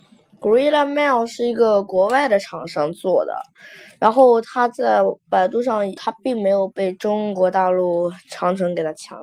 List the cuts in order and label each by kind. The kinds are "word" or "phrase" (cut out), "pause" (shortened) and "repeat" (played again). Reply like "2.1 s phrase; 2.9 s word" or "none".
6.0 s word

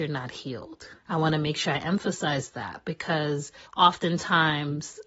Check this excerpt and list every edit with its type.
1.0 s pause; 3.7 s pause

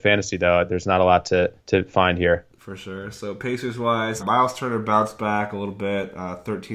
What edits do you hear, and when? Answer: 1.6 s pause; 4.2 s word

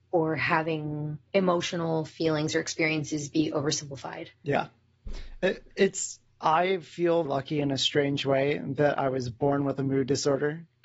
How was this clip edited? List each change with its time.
1.3 s pause; 4.3 s pause; 6.3 s pause; 7.3 s word

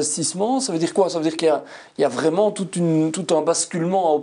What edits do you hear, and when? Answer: none

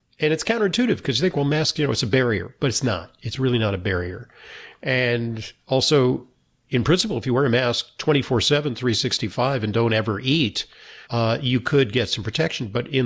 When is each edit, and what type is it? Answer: 11.0 s pause

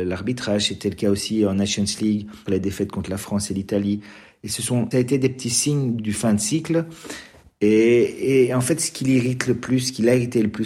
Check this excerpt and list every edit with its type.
2.5 s word; 4.9 s word; 6.0 s word

